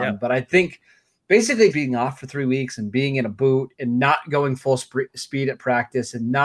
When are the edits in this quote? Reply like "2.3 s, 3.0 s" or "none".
1.7 s